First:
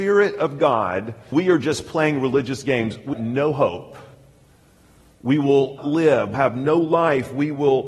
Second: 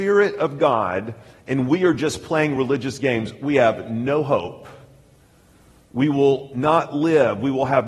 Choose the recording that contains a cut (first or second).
first